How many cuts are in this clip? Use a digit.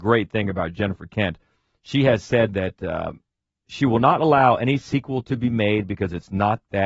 0